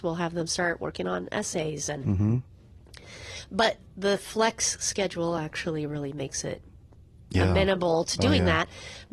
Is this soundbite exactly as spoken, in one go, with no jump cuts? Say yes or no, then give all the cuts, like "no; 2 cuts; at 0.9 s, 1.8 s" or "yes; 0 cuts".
yes; 0 cuts